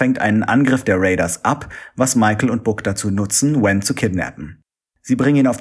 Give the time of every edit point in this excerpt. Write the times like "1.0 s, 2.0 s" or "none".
none